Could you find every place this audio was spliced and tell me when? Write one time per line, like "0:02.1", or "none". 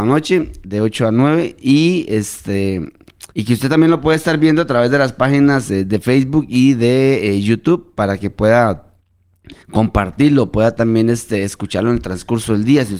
0:03.3
0:09.6